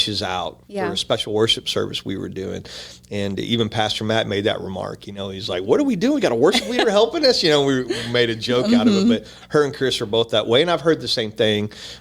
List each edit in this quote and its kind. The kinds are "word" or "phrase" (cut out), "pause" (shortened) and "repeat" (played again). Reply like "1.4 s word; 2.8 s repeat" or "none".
none